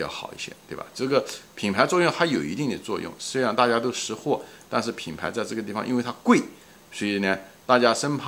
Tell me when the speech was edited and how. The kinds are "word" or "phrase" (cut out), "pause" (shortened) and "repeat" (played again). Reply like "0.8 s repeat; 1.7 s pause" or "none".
none